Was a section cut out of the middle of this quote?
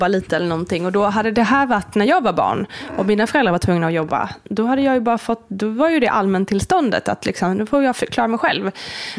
no; 0 cuts

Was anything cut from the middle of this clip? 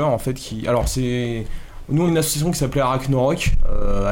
yes; 1 cut; at 2.1 s

